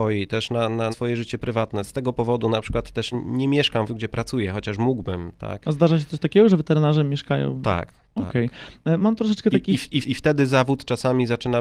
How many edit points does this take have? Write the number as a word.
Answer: four